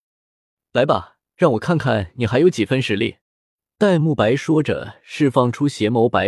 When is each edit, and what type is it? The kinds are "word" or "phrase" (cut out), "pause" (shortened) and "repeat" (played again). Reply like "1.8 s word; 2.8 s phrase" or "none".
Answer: 1.3 s pause; 3.2 s pause